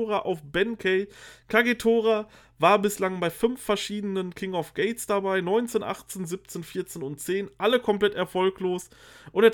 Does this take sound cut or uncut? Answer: uncut